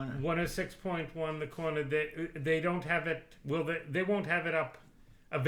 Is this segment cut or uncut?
uncut